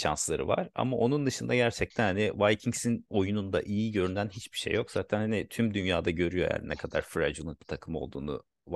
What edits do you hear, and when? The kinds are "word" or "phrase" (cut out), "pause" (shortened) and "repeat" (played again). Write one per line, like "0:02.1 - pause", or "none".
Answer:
none